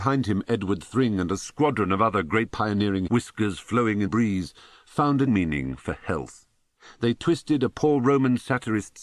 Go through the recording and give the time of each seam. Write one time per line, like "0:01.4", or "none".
0:02.5
0:03.1
0:04.1
0:05.3